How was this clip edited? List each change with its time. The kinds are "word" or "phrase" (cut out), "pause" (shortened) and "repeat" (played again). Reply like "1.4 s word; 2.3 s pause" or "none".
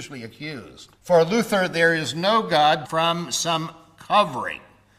1.0 s pause; 2.8 s phrase